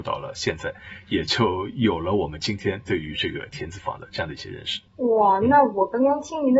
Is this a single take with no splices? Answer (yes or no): no